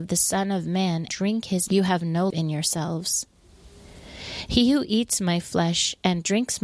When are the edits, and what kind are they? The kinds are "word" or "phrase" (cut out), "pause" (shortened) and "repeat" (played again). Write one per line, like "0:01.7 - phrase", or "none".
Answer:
0:01.1 - word
0:01.7 - word
0:02.3 - word